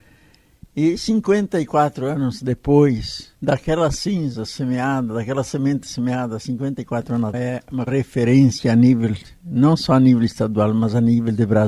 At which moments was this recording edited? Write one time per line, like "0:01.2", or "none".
0:03.3
0:07.3
0:07.9